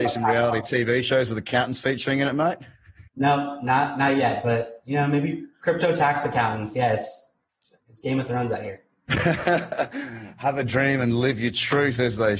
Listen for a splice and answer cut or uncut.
cut